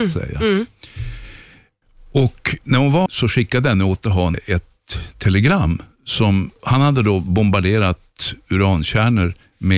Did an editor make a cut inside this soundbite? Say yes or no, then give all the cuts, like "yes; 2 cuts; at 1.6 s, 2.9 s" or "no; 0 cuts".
yes; 4 cuts; at 1.8 s, 3.1 s, 4.3 s, 5.9 s